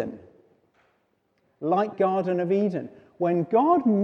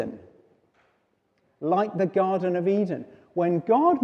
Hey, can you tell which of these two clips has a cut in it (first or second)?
first